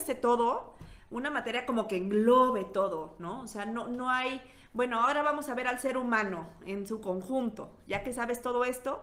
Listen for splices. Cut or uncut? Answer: uncut